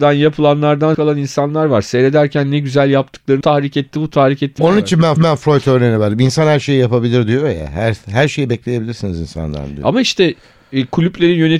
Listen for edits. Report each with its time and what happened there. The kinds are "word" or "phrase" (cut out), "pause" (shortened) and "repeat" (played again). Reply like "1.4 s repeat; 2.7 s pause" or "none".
0.9 s word; 3.4 s phrase; 4.6 s word; 5.2 s repeat

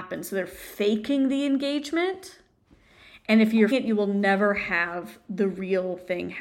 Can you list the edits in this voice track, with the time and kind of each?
3.7 s word

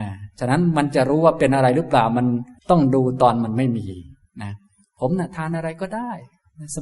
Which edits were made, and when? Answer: 2.6 s pause

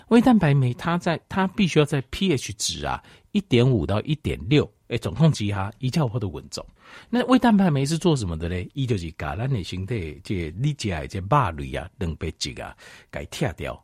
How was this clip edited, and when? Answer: none

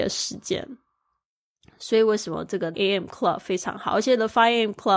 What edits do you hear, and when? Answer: 2.7 s phrase

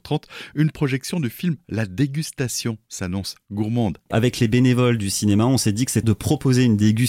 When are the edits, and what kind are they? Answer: 6.0 s word

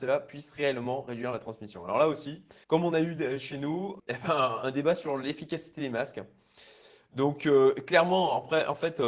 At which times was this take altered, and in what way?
2.6 s pause

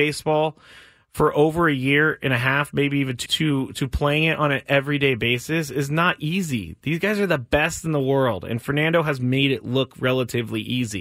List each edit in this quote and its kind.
3.3 s word

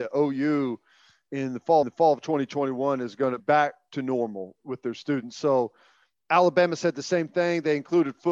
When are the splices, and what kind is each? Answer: 1.8 s repeat; 3.4 s word; 4.6 s word

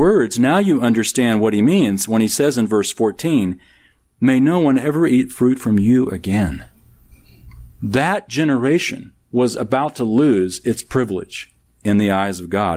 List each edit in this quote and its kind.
9.2 s pause

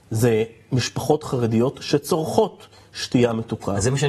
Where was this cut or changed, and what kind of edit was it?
none

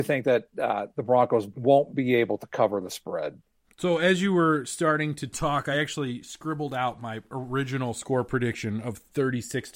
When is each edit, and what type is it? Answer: none

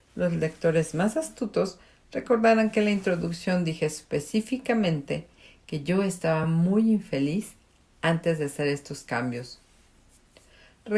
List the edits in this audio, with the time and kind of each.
none

